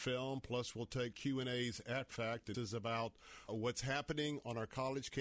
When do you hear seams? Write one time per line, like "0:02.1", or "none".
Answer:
0:01.1
0:02.1
0:02.5
0:03.5